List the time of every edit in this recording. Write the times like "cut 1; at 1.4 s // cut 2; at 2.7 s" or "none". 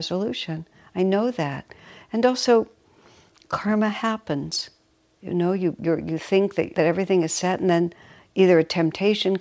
cut 1; at 6.7 s